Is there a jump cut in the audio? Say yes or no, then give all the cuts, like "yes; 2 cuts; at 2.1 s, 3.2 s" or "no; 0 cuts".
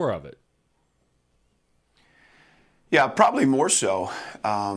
no; 0 cuts